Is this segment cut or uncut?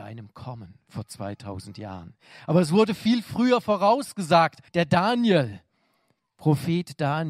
cut